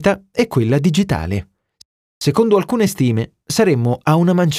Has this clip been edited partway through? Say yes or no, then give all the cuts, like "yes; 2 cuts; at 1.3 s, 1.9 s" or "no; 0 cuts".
no; 0 cuts